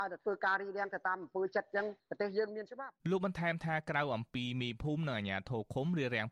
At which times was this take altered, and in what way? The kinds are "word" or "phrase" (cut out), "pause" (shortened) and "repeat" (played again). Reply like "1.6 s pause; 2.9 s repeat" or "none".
3.0 s pause